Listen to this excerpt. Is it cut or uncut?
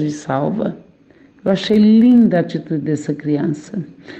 uncut